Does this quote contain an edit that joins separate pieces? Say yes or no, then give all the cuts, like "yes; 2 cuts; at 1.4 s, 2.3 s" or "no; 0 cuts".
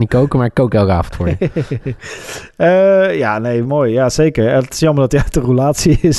no; 0 cuts